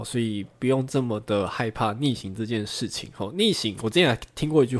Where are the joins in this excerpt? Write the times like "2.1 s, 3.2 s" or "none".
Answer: none